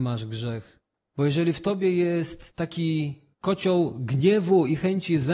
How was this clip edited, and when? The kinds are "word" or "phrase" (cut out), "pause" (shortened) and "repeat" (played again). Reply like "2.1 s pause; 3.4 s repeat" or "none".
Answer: 3.3 s pause